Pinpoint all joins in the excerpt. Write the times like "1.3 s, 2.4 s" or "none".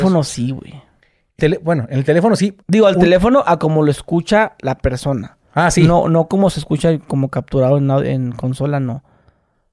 1.4 s, 2.6 s